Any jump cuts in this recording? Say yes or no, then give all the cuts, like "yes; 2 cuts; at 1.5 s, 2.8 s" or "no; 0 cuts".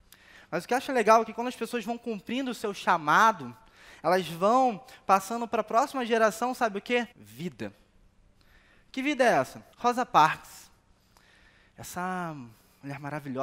yes; 2 cuts; at 7.1 s, 9.7 s